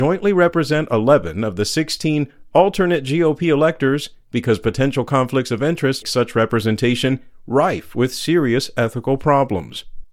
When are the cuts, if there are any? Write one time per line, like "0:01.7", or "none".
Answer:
0:06.0